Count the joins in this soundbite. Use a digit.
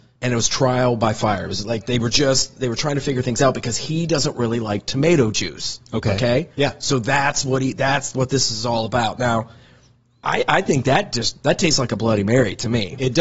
0